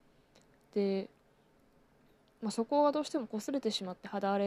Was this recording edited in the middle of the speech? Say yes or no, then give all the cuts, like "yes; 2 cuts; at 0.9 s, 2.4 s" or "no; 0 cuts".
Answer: no; 0 cuts